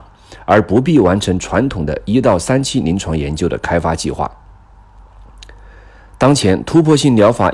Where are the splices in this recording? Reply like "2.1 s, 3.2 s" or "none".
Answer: none